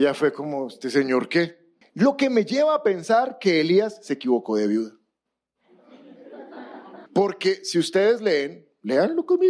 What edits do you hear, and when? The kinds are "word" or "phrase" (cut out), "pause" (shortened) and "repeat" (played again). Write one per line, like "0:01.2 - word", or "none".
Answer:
0:01.8 - pause
0:07.1 - pause